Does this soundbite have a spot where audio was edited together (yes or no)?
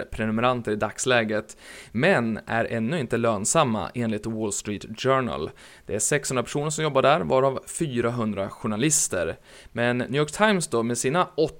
no